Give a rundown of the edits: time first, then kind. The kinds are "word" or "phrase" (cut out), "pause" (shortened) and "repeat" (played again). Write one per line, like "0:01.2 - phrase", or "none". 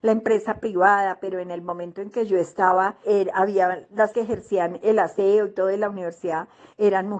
0:03.0 - word
0:04.1 - word